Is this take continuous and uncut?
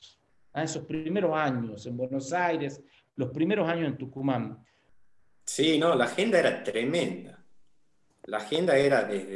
yes; 0 cuts

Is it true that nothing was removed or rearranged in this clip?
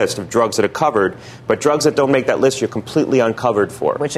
yes; 0 cuts

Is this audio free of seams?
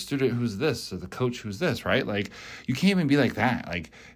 yes; 0 cuts

